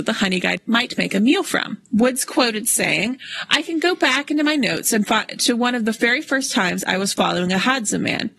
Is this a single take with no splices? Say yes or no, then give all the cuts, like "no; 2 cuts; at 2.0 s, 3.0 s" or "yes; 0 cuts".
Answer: no; 1 cut; at 1.9 s